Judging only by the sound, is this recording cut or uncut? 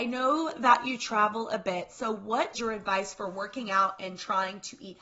cut